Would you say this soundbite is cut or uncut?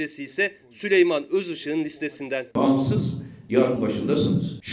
cut